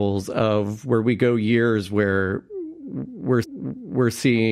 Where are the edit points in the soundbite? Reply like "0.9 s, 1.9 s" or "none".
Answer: 3.4 s